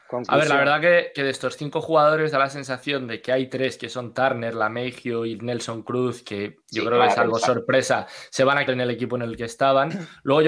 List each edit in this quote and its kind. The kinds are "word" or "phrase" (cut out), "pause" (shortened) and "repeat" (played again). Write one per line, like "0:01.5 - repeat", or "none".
0:08.7 - word